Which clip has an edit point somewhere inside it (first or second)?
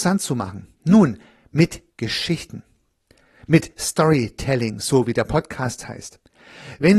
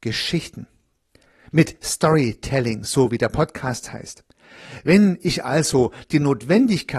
first